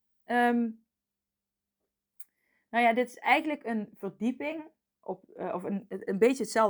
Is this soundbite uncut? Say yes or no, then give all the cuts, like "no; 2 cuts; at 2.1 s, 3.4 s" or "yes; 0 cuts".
yes; 0 cuts